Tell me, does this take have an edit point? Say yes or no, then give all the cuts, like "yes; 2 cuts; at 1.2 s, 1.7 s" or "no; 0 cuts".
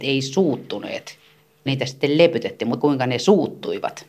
yes; 2 cuts; at 1.7 s, 2.8 s